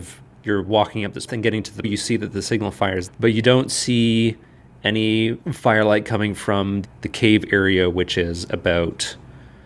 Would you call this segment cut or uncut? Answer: cut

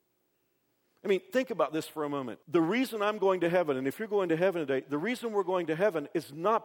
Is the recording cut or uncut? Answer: cut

